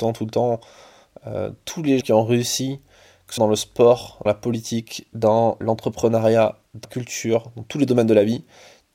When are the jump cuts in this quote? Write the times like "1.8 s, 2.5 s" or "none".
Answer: 2.0 s, 3.4 s, 4.3 s, 5.6 s, 6.8 s

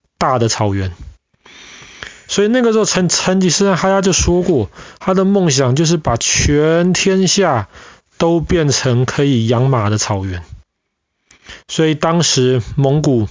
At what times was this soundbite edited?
none

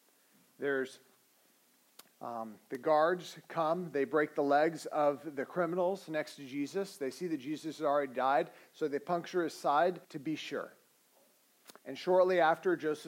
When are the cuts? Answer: 2.1 s, 10.0 s, 11.8 s

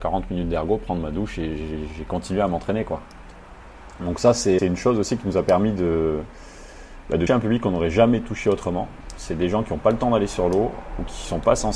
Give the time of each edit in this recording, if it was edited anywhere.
4.6 s, 7.3 s

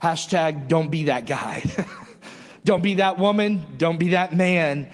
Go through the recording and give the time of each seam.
none

